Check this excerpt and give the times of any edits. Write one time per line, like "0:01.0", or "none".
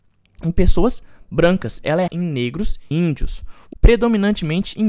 0:02.1
0:02.9
0:03.7